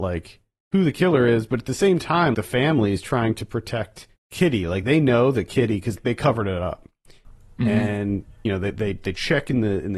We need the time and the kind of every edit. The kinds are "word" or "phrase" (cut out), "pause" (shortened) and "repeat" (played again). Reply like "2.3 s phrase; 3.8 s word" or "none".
2.3 s word; 4.2 s pause; 6.0 s word